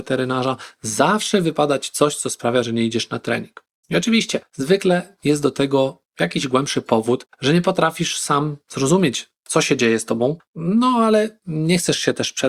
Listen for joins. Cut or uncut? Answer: cut